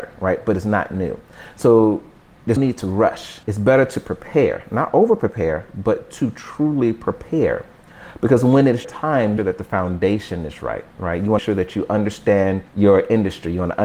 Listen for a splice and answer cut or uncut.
cut